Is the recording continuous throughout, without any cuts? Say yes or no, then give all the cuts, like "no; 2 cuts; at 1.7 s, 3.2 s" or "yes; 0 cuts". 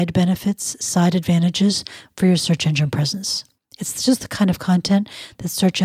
yes; 0 cuts